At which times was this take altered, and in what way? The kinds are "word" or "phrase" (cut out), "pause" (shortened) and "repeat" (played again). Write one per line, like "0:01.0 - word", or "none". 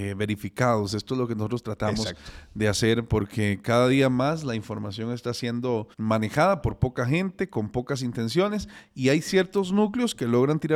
0:05.9 - pause